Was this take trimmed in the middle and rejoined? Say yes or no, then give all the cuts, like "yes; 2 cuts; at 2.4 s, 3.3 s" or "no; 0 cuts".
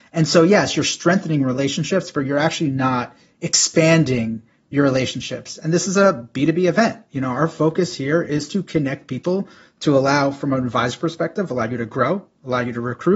no; 0 cuts